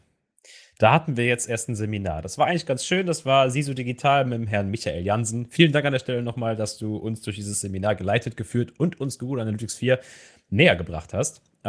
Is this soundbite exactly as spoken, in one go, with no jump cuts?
yes; 0 cuts

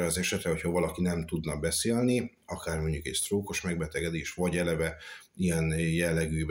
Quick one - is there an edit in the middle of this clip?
no; 0 cuts

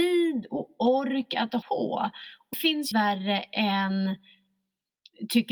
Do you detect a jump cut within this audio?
yes; 3 cuts; at 1.6 s, 2.5 s, 2.9 s

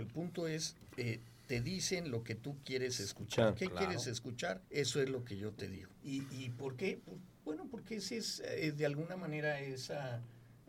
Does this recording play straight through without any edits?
no; 2 cuts; at 4.6 s, 5.9 s

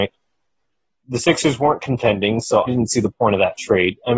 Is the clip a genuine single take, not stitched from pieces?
no; 1 cut; at 2.7 s

